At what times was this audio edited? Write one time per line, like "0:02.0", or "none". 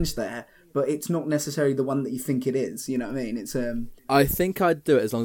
0:04.0